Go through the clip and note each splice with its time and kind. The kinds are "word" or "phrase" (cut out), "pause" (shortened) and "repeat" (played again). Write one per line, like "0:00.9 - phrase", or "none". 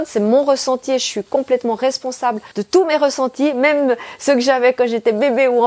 0:02.5 - pause